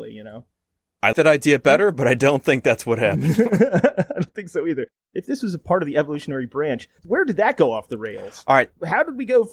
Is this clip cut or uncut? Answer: cut